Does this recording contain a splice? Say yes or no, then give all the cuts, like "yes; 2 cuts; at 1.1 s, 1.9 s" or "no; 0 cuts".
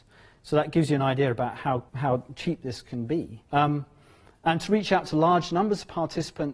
yes; 2 cuts; at 1.9 s, 3.5 s